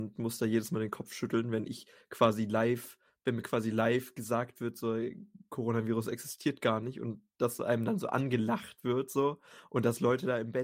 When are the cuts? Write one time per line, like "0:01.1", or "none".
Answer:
none